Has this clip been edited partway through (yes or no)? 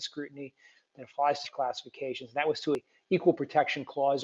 yes